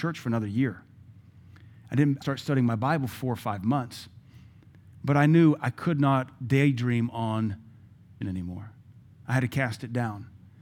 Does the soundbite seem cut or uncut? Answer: cut